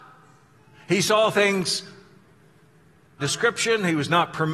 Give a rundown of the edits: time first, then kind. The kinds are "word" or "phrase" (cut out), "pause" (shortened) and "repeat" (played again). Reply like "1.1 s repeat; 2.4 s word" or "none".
3.2 s word

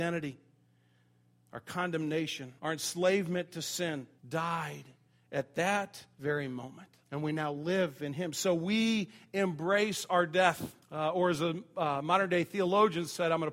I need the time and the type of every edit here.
2.6 s pause; 4.2 s pause; 6.1 s pause; 7.0 s pause; 10.8 s pause

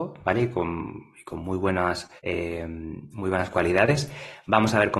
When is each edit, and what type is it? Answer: 2.2 s pause

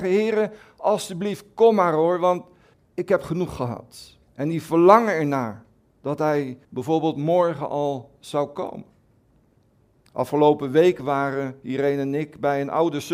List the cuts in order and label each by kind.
2.7 s word; 4.3 s pause; 6.6 s pause

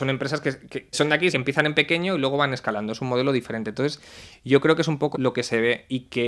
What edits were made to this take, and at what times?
0.9 s word; 1.3 s phrase; 5.1 s word

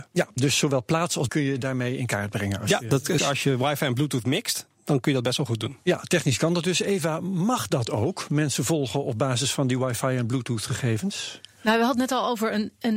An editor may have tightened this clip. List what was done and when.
1.3 s word; 3.2 s word

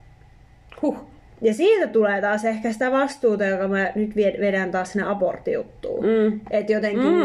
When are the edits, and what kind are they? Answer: none

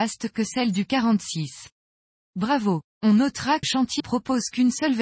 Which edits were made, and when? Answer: 3.6 s word; 4.0 s word

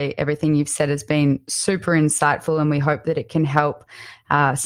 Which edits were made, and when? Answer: none

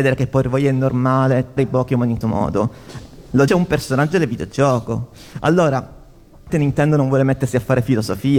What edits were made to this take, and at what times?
1.6 s word; 2.2 s word; 3.5 s word; 6.5 s word

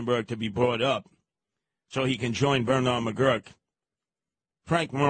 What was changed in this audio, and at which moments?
none

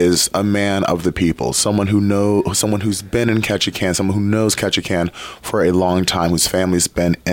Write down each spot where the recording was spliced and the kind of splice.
none

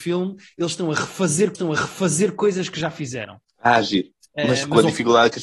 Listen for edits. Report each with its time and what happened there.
1.5 s repeat; 3.4 s pause; 4.3 s pause

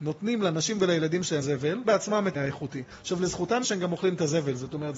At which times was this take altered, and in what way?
1.4 s word; 1.8 s word; 2.3 s word; 3.6 s word

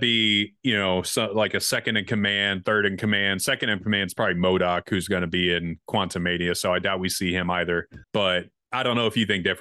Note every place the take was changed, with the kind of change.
8.0 s pause

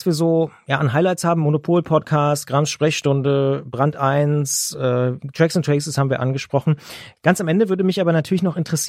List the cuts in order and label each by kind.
none

